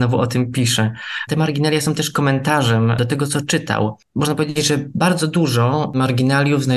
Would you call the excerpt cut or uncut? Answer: uncut